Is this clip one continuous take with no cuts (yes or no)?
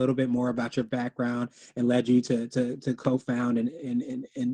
yes